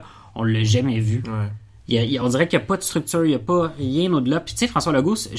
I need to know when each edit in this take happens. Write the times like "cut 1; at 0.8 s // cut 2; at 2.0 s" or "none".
none